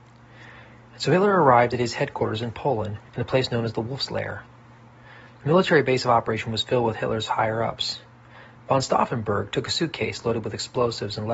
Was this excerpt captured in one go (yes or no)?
no